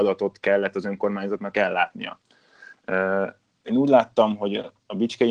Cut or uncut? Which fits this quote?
uncut